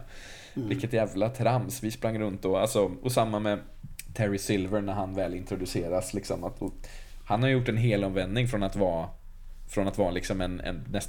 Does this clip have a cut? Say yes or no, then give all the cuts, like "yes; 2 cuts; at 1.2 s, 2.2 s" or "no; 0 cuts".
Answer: no; 0 cuts